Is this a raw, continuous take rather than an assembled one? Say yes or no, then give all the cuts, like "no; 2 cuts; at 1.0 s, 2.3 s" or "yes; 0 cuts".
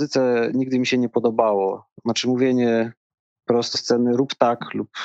no; 1 cut; at 3.7 s